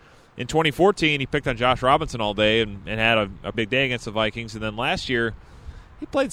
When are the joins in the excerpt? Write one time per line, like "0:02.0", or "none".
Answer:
0:03.5

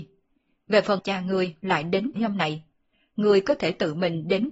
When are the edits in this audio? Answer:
0:01.0
0:02.2

